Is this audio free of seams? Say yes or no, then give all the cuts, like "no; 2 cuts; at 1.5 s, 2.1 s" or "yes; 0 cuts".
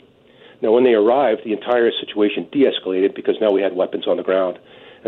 yes; 0 cuts